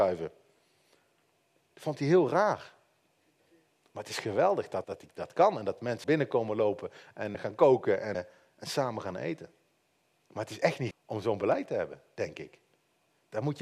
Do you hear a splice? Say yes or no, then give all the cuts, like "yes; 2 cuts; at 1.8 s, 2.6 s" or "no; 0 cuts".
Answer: yes; 5 cuts; at 4.8 s, 6.0 s, 7.3 s, 8.1 s, 10.9 s